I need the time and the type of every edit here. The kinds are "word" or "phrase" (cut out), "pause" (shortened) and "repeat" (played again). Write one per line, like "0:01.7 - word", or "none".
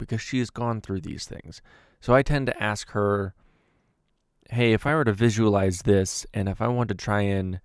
none